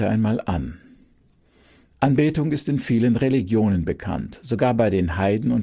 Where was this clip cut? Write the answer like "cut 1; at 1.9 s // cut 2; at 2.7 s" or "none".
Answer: none